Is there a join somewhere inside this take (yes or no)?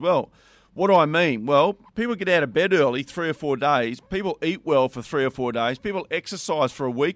no